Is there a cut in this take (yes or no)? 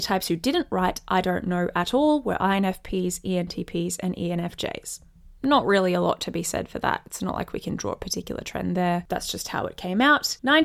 no